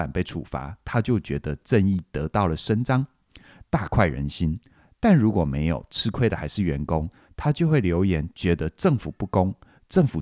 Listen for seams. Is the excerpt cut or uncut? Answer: uncut